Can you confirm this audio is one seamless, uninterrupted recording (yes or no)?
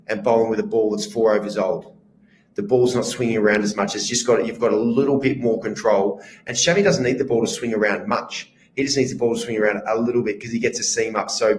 yes